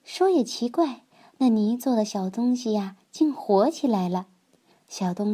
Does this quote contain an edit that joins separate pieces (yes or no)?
no